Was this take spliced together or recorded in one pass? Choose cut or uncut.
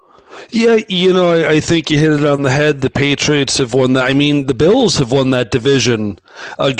uncut